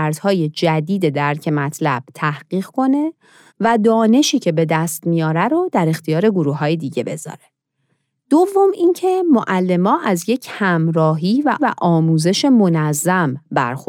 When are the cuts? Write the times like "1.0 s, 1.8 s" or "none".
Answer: 11.6 s